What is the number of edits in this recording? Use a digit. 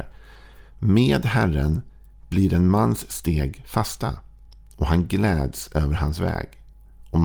0